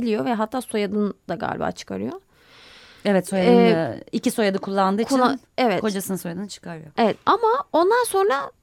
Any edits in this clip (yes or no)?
no